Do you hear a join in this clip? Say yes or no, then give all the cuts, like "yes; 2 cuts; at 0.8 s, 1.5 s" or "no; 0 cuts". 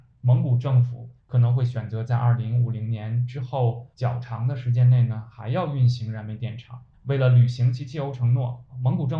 yes; 3 cuts; at 1.2 s, 3.9 s, 6.9 s